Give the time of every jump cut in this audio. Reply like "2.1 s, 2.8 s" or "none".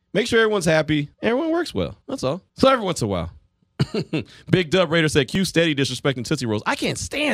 1.1 s, 2.0 s, 2.5 s